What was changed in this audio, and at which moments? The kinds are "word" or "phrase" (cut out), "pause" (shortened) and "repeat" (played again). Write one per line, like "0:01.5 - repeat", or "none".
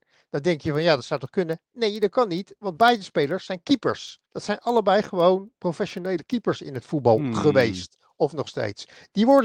0:04.3 - pause